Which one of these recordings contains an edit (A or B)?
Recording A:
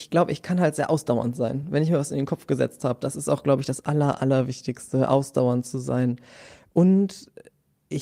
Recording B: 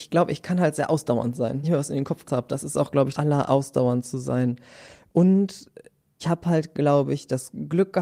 B